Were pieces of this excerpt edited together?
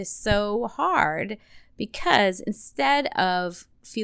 no; 0 cuts

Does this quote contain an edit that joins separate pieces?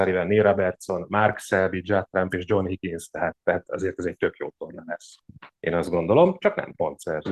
yes; 1 cut; at 5.5 s

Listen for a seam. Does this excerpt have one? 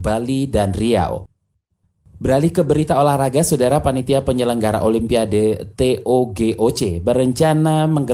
no; 0 cuts

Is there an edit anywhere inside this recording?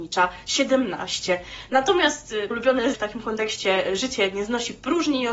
yes; 2 cuts; at 2.5 s, 2.9 s

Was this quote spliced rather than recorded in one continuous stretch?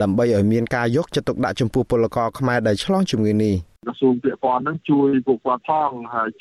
yes; 1 cut; at 3.8 s

